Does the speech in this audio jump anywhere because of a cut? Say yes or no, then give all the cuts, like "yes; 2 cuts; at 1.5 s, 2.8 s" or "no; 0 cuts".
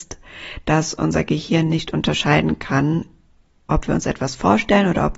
no; 0 cuts